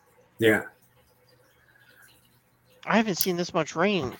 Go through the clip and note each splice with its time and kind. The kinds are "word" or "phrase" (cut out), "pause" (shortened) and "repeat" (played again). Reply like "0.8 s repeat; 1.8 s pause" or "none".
none